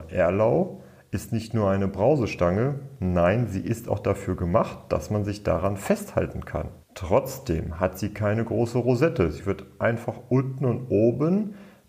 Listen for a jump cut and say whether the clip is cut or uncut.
cut